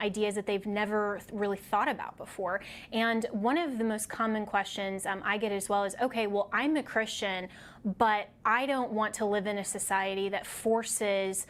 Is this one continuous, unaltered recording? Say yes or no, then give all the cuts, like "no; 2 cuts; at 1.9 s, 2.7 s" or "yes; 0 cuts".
yes; 0 cuts